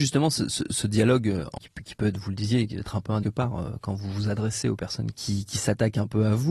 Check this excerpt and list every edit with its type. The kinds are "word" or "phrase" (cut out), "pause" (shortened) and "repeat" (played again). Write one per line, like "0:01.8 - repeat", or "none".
0:01.6 - word
0:03.2 - phrase
0:05.1 - word